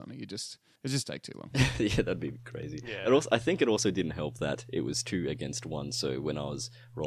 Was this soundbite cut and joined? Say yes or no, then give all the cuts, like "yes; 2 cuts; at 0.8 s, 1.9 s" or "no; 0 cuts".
no; 0 cuts